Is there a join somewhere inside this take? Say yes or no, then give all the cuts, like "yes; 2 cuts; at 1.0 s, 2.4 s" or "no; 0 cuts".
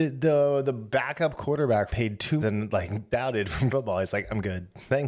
yes; 4 cuts; at 1.9 s, 2.4 s, 3.1 s, 3.7 s